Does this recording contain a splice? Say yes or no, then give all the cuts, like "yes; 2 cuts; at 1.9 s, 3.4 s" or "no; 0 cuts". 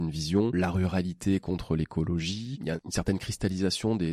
no; 0 cuts